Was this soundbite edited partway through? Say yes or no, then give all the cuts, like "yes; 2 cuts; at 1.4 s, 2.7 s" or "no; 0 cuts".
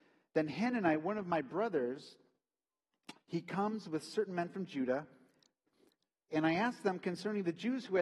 no; 0 cuts